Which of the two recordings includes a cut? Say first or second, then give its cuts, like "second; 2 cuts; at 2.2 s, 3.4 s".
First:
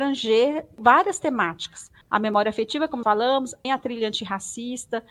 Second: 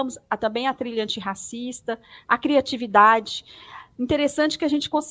first; 3 cuts; at 2.0 s, 3.0 s, 3.6 s